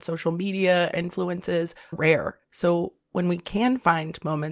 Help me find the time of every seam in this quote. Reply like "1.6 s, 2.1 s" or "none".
0.9 s, 1.9 s, 2.4 s